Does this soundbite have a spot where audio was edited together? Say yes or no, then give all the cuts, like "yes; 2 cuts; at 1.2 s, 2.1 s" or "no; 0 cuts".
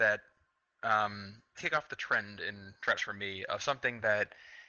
yes; 2 cuts; at 1.6 s, 3.0 s